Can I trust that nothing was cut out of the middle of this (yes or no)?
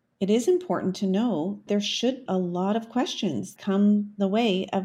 no